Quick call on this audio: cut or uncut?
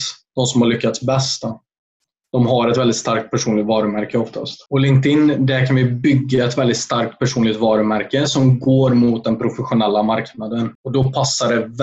uncut